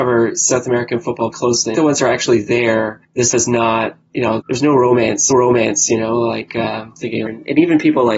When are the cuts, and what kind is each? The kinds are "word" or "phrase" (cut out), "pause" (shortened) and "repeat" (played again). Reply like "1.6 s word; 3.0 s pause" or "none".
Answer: 1.3 s word; 1.8 s phrase; 3.3 s word; 4.4 s word; 5.3 s repeat; 7.3 s phrase